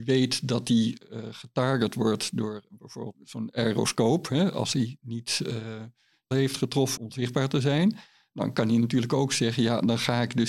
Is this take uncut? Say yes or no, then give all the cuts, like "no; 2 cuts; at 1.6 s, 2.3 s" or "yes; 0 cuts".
no; 3 cuts; at 3.1 s, 6.3 s, 7.0 s